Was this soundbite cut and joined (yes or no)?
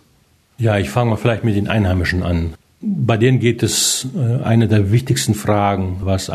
no